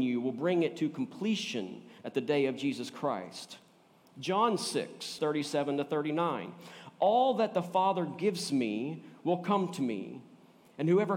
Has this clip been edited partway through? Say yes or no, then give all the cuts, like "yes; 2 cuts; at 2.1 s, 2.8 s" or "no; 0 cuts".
yes; 2 cuts; at 2.0 s, 5.2 s